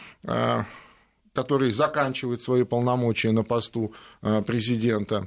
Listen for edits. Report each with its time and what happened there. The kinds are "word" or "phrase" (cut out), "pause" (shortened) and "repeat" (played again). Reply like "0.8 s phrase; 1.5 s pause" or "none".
none